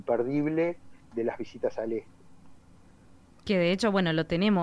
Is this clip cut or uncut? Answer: uncut